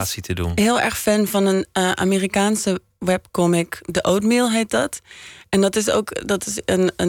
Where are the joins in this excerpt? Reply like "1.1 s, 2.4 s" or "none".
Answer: none